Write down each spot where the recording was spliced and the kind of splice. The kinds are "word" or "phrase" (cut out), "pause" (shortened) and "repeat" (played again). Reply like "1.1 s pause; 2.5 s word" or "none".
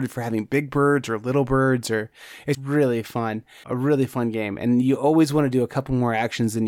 2.5 s word; 3.6 s word